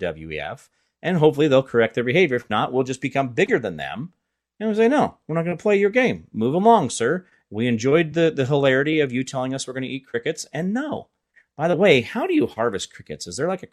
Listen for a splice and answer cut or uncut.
uncut